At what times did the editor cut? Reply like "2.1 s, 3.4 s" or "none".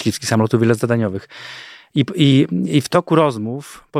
none